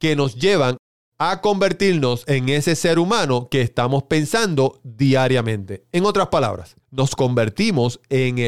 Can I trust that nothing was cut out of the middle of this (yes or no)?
no